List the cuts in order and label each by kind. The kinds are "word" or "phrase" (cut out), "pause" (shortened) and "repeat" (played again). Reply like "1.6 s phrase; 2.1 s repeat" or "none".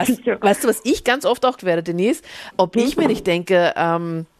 1.6 s word; 2.5 s word